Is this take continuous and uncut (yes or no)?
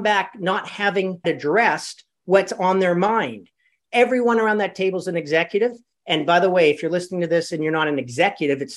no